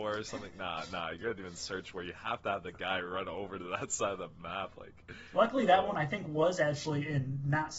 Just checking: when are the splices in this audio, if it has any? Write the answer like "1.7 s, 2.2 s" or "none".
none